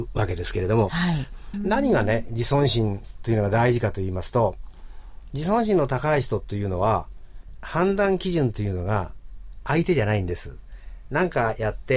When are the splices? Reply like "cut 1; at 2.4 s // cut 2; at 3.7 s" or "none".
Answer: cut 1; at 1.5 s